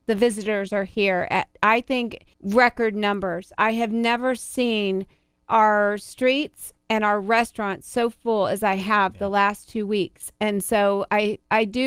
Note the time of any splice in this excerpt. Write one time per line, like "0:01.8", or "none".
0:02.3